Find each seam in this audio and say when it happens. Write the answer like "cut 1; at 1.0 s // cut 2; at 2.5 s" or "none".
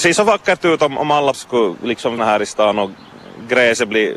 cut 1; at 1.3 s // cut 2; at 2.2 s